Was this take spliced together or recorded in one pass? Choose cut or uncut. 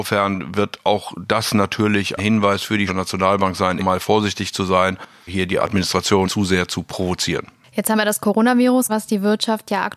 cut